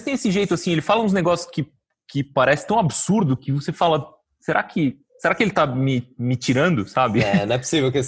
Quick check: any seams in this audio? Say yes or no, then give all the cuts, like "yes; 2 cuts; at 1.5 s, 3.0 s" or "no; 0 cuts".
no; 0 cuts